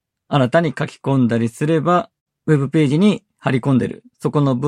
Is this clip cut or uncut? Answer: cut